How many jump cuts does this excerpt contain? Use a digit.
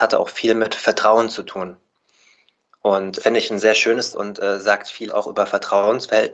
3